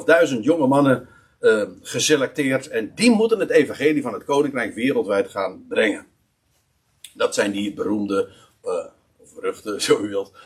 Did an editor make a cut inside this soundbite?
no; 0 cuts

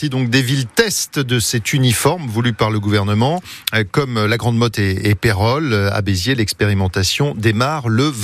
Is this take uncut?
yes; 0 cuts

